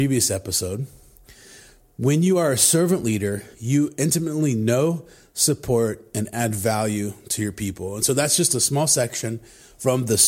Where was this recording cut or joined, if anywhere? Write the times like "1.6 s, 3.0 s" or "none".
3.5 s